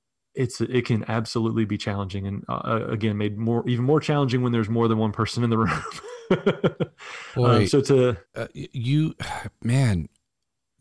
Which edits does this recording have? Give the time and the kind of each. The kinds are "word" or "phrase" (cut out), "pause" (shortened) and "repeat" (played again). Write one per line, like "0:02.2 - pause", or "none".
0:08.3 - pause